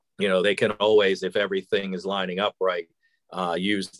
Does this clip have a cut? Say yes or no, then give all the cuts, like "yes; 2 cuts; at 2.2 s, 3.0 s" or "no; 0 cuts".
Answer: no; 0 cuts